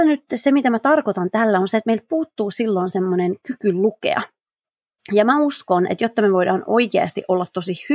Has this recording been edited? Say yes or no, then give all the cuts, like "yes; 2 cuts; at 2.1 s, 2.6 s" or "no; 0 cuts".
no; 0 cuts